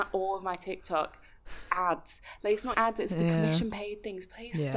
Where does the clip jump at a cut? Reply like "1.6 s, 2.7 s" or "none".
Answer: 2.7 s